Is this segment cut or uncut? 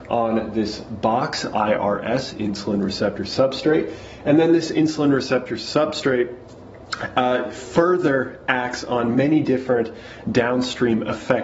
uncut